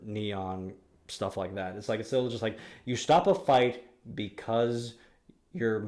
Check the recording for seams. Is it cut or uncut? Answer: uncut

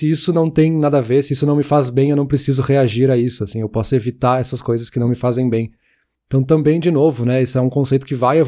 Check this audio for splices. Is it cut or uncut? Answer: uncut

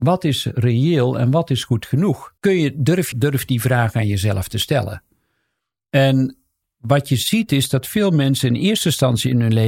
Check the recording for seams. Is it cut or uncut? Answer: cut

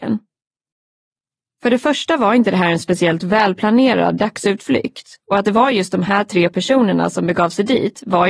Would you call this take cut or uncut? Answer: uncut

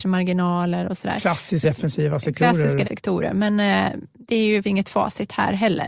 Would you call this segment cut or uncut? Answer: cut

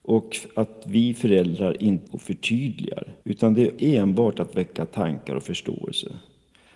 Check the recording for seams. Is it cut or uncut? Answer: cut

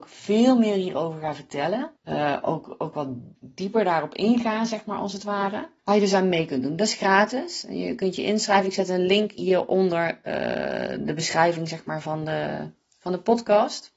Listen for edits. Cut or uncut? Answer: cut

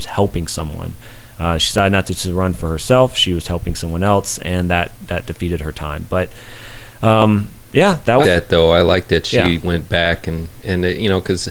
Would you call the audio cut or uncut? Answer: cut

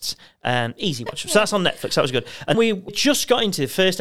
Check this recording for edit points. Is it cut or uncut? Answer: cut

